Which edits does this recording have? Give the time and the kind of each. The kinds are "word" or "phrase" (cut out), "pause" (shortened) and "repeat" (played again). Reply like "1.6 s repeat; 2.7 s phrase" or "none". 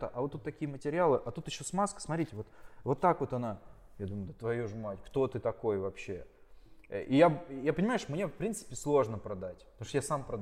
none

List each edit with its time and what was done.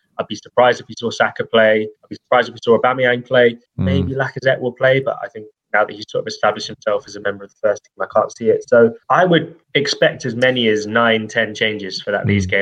2.0 s pause; 3.7 s pause; 9.0 s pause; 9.6 s pause

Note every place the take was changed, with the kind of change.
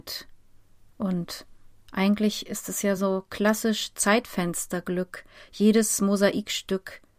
none

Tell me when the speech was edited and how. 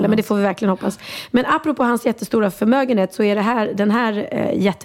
none

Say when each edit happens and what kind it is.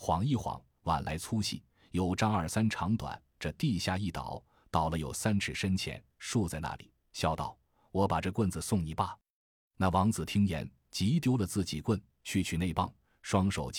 none

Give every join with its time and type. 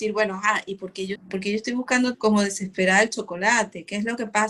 1.2 s word; 2.1 s word

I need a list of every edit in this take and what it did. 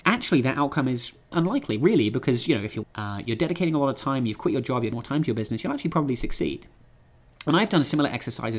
1.3 s word; 2.8 s phrase; 4.9 s word

